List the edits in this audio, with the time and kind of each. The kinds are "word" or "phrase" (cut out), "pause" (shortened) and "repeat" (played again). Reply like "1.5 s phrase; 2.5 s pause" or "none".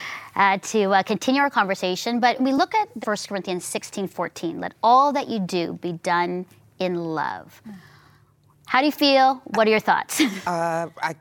2.4 s word; 3.0 s word